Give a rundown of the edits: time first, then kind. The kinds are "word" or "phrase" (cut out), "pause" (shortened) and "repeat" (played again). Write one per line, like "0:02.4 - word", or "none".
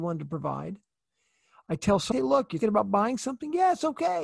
0:02.1 - phrase
0:02.6 - word